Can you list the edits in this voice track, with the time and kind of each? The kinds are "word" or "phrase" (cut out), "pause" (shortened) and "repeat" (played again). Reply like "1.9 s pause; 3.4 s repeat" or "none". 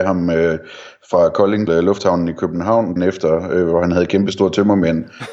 1.7 s word; 3.0 s word